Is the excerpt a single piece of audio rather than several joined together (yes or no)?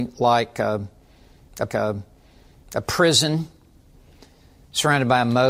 no